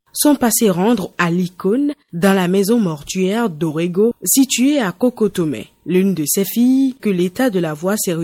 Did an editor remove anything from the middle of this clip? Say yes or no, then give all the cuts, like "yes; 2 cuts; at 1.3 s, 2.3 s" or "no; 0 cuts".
yes; 2 cuts; at 1.1 s, 7.0 s